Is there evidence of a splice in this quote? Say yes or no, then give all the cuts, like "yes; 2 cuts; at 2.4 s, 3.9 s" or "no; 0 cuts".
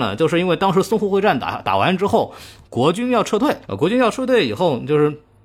yes; 1 cut; at 3.6 s